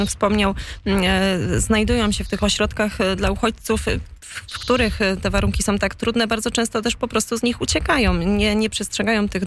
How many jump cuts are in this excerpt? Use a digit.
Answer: 0